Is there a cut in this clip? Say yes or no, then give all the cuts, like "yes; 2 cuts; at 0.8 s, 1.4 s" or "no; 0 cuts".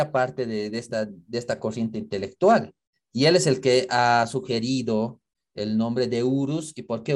no; 0 cuts